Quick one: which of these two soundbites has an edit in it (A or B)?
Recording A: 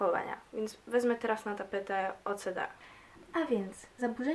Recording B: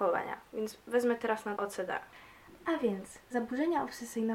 B